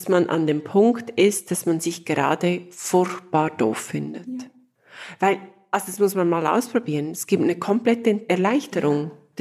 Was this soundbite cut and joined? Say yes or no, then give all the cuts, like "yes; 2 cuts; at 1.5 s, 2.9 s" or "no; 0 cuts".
no; 0 cuts